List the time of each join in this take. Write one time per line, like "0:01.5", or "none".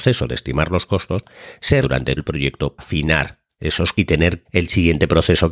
0:01.8
0:02.2
0:02.8
0:03.9
0:04.4